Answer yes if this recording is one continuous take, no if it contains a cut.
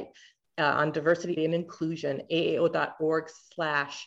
no